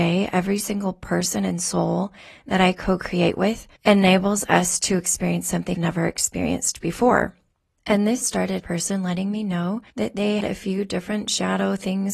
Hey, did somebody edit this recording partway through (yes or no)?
yes